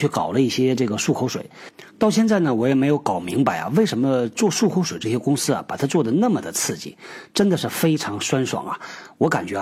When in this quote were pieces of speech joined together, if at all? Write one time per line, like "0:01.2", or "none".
0:01.9